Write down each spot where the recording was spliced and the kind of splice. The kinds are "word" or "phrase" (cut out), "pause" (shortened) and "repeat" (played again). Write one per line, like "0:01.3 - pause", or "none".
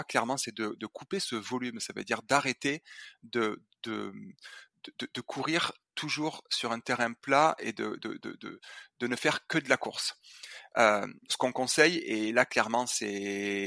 0:11.3 - word